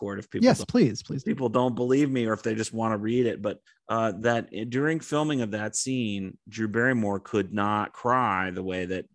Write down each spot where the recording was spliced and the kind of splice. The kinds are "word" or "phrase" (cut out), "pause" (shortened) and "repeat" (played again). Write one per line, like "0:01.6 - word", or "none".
0:03.7 - pause